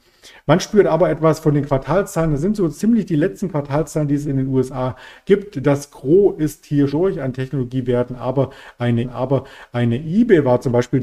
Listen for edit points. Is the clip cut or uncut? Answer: cut